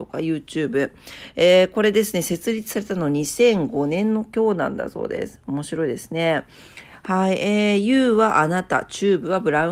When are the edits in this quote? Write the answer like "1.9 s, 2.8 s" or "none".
none